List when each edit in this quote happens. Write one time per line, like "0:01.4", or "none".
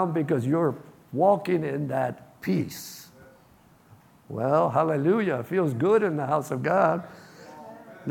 none